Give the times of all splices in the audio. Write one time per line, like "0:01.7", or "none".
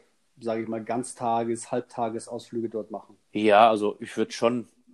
0:03.2